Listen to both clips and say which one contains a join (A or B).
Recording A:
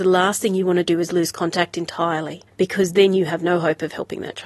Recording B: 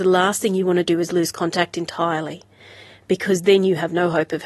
A